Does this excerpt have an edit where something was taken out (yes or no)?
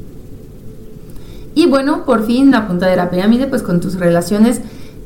no